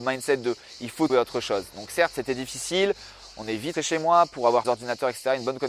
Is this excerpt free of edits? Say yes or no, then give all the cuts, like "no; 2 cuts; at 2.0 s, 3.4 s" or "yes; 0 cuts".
no; 3 cuts; at 1.1 s, 3.7 s, 4.6 s